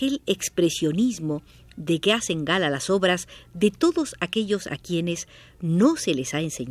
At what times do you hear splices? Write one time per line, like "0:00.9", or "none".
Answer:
none